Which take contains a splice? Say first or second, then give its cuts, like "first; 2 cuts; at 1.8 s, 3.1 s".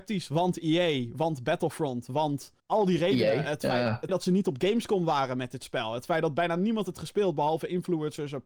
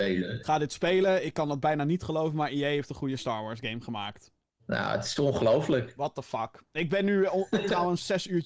first; 3 cuts; at 2.6 s, 4.1 s, 6.9 s